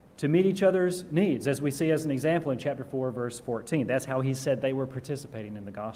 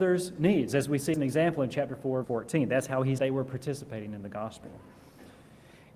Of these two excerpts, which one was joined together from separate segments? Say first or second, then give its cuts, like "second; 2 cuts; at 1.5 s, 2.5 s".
second; 3 cuts; at 1.1 s, 2.2 s, 3.2 s